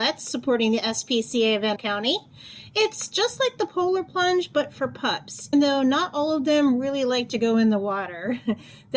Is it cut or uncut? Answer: cut